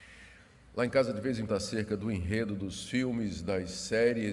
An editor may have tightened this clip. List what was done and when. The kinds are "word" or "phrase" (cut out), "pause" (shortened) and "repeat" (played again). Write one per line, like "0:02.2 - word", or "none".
0:01.5 - phrase

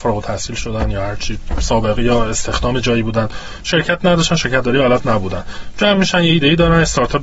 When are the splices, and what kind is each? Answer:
none

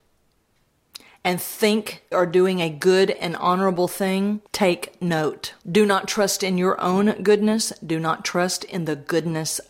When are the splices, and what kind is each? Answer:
0:02.1 - word
0:04.5 - pause
0:05.6 - pause

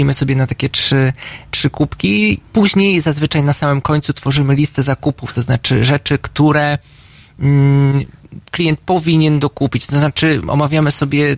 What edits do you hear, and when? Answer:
0:02.5 - pause

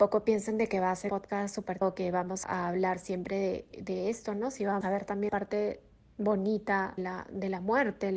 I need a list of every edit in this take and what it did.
0:01.1 - word
0:01.8 - word
0:02.4 - word
0:03.7 - word
0:04.8 - word
0:05.3 - word
0:07.0 - word

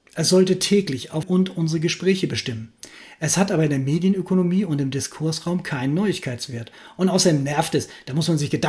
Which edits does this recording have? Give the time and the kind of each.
0:01.2 - phrase

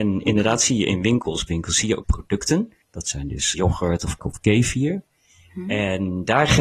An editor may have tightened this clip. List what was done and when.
0:01.5 - word
0:02.0 - phrase
0:02.8 - pause
0:03.5 - word
0:04.2 - word

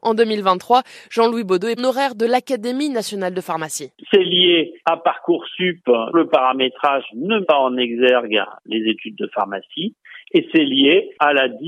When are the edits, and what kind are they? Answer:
0:01.8 - word
0:06.1 - word
0:07.4 - word

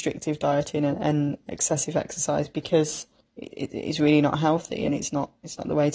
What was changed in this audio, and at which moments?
0:03.2 - pause

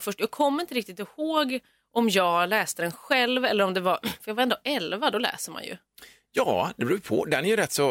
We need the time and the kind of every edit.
none

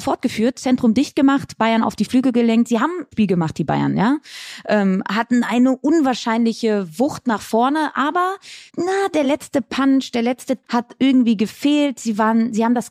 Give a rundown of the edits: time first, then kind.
0:03.1 - phrase
0:08.7 - pause
0:09.2 - phrase
0:10.6 - word

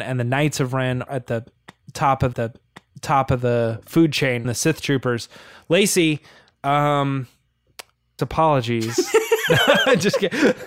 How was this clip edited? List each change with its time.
0:01.1 - word
0:02.3 - repeat
0:04.4 - word
0:08.2 - phrase

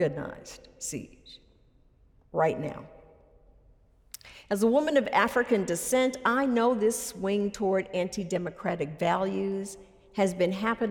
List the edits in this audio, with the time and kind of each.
none

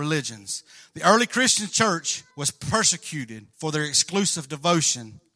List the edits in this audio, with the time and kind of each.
0:02.3 - pause
0:03.5 - pause

